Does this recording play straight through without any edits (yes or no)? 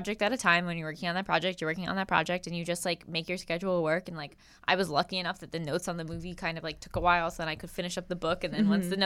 yes